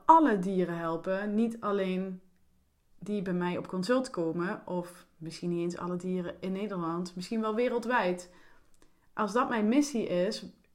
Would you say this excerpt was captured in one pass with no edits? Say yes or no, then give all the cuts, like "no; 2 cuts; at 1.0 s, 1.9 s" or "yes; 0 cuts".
yes; 0 cuts